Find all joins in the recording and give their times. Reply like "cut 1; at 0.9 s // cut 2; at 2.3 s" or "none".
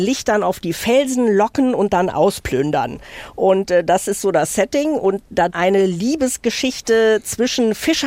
cut 1; at 5.5 s